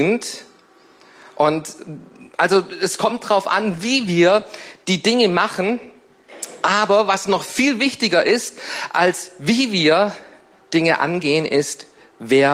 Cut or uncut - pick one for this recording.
uncut